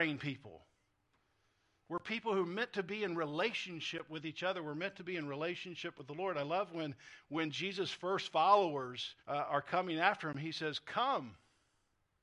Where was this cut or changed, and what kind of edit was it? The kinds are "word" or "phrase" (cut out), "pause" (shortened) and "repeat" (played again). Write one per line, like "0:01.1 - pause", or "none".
0:09.2 - pause